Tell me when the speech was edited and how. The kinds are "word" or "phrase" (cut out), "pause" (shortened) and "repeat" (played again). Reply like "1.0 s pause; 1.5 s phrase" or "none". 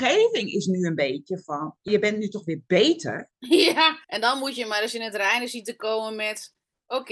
1.9 s word; 4.0 s pause